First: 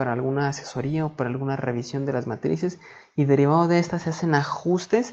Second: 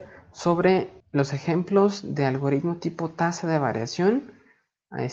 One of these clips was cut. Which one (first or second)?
second